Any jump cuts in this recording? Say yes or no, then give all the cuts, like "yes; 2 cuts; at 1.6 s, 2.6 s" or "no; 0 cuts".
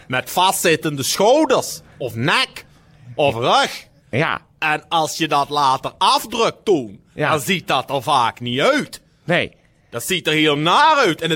no; 0 cuts